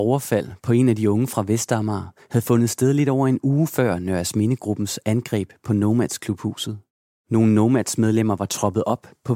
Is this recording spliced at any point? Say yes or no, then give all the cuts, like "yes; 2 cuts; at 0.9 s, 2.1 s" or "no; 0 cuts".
no; 0 cuts